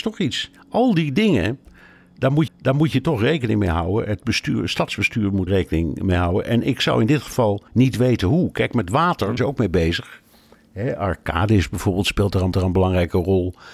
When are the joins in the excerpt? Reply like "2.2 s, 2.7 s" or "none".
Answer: 2.5 s, 5.5 s, 7.7 s, 9.4 s, 12.5 s